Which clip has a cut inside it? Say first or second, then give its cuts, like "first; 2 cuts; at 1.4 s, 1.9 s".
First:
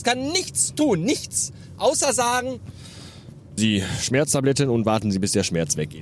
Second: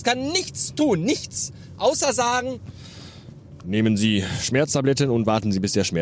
first; 1 cut; at 3.6 s